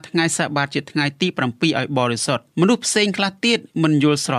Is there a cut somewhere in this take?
yes; 1 cut; at 2.5 s

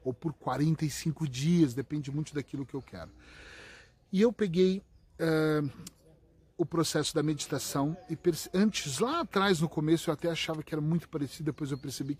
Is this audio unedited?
yes; 0 cuts

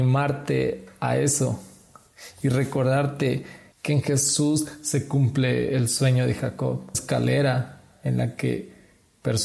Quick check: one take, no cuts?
no; 2 cuts; at 3.7 s, 6.9 s

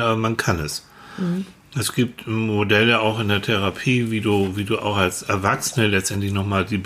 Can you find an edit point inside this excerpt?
no; 0 cuts

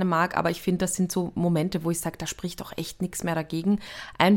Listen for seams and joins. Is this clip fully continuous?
yes; 0 cuts

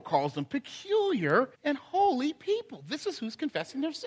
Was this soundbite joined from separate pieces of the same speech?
yes; 1 cut; at 1.5 s

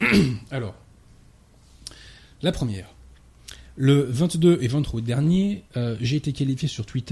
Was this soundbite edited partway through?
no; 0 cuts

